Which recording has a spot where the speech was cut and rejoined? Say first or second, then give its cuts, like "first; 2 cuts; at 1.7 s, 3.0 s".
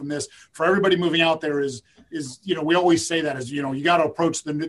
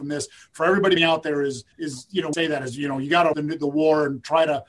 second; 4 cuts; at 1.0 s, 1.7 s, 2.3 s, 3.3 s